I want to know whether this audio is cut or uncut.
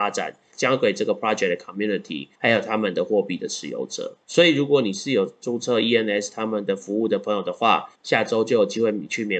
cut